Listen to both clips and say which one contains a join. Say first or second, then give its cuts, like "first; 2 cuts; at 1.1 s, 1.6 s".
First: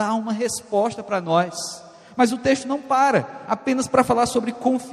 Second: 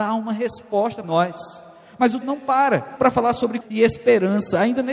second; 4 cuts; at 1.0 s, 2.2 s, 3.0 s, 3.6 s